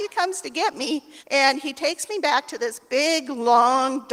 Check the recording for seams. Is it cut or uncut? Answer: cut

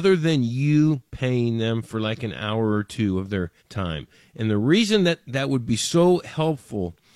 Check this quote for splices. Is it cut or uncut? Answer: cut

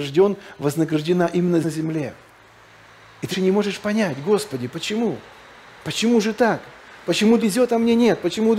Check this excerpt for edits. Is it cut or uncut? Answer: cut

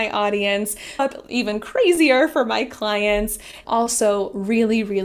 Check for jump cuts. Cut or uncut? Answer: cut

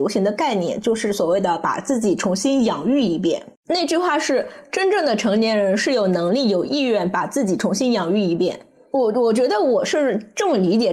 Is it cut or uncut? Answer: cut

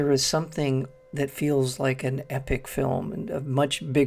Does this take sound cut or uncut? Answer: uncut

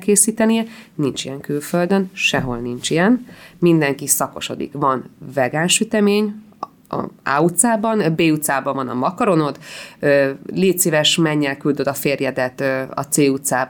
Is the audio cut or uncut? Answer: uncut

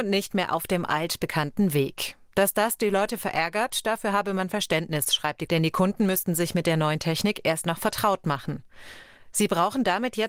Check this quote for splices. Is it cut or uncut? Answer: cut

